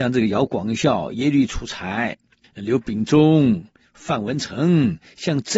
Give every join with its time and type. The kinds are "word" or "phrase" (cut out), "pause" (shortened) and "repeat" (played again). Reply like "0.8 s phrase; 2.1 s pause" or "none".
2.4 s word